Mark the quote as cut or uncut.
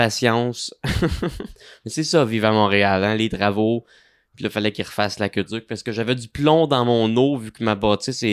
uncut